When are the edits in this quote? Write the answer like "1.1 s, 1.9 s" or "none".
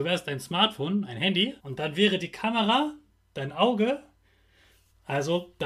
1.6 s